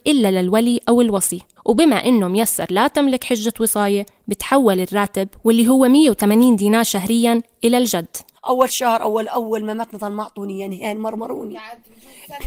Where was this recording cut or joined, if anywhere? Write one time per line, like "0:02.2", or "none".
0:01.6